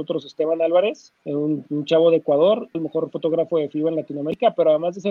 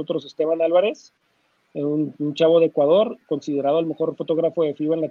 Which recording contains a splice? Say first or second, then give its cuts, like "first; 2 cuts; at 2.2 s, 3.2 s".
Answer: first; 2 cuts; at 1.2 s, 2.7 s